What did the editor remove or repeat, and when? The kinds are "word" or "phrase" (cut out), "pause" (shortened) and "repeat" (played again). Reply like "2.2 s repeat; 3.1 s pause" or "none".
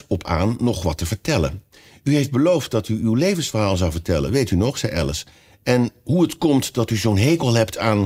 none